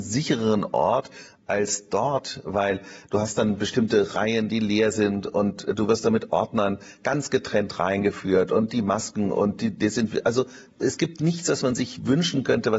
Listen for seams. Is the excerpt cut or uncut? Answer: uncut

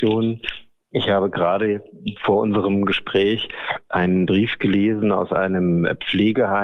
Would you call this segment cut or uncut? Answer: uncut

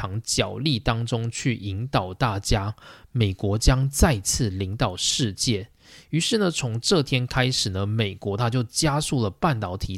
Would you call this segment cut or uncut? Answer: uncut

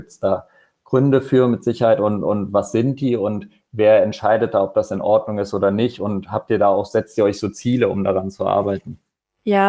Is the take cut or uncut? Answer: uncut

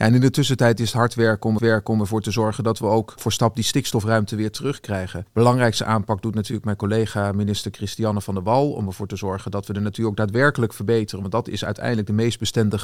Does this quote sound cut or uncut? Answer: cut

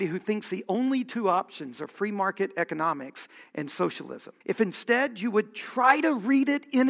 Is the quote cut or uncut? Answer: cut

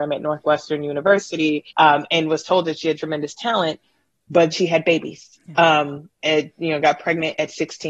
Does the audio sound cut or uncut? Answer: cut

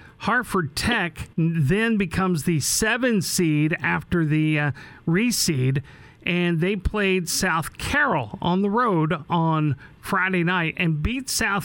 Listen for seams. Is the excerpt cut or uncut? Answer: cut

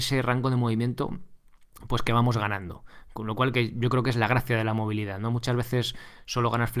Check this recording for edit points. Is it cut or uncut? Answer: uncut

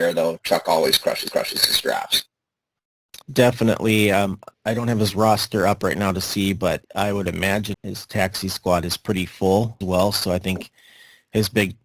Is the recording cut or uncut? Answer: cut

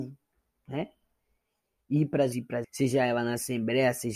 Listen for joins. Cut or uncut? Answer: cut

